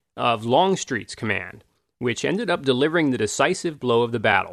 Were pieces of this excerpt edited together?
no; 0 cuts

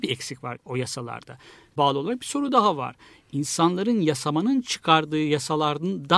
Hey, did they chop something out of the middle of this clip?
no; 0 cuts

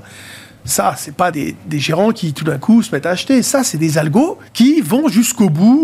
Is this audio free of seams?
no; 2 cuts; at 1.3 s, 4.5 s

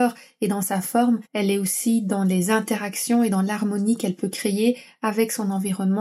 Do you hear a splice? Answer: yes; 1 cut; at 1.3 s

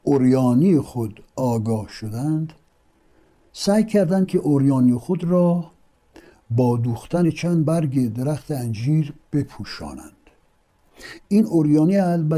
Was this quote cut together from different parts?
no; 0 cuts

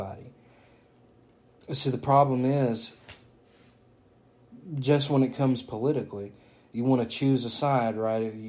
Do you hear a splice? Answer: no; 0 cuts

